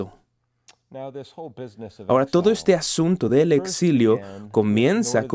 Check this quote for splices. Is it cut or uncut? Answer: uncut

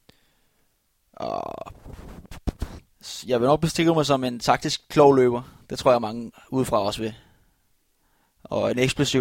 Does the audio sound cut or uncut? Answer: uncut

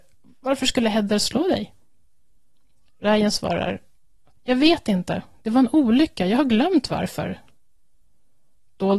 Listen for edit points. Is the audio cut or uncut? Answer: uncut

